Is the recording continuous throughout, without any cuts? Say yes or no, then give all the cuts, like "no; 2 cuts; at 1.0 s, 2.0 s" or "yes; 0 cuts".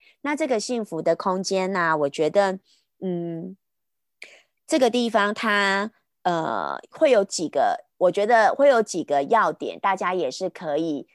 yes; 0 cuts